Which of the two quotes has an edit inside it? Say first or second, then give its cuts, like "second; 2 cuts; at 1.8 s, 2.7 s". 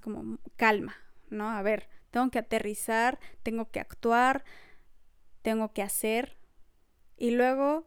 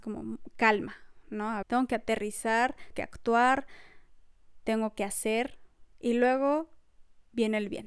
second; 3 cuts; at 1.6 s, 2.9 s, 5.9 s